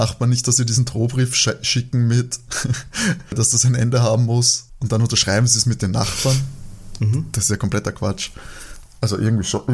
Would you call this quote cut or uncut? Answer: uncut